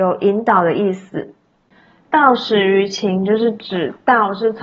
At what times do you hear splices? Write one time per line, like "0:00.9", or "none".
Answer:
none